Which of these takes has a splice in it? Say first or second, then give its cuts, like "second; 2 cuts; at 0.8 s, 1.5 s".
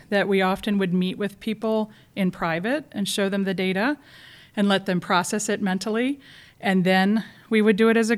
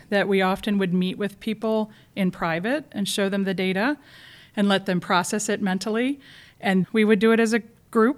second; 1 cut; at 6.8 s